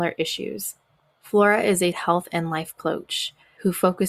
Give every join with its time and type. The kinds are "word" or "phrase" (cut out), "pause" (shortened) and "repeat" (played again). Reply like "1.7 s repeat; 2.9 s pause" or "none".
1.9 s word